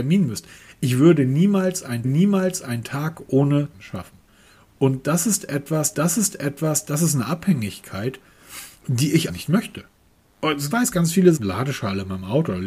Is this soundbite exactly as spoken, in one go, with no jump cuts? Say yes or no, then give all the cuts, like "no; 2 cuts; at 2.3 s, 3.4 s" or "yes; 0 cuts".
no; 7 cuts; at 2.0 s, 3.7 s, 5.9 s, 8.8 s, 9.3 s, 10.7 s, 11.4 s